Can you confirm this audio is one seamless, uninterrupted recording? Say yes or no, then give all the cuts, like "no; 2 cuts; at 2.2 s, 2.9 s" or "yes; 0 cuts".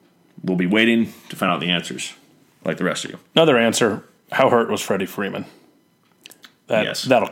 yes; 0 cuts